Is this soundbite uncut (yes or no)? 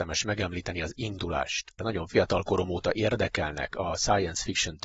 no